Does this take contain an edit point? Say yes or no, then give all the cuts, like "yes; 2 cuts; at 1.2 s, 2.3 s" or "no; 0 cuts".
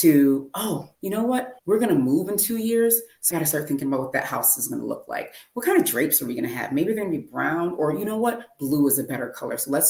yes; 3 cuts; at 1.0 s, 1.6 s, 3.3 s